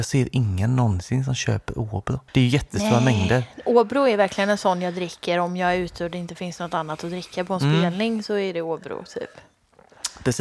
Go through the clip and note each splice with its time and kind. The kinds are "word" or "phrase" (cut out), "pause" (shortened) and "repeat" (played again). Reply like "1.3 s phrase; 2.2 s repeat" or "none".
2.3 s pause